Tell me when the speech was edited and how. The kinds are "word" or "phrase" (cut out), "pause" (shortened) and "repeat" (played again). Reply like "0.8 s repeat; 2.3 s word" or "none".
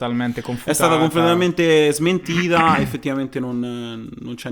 none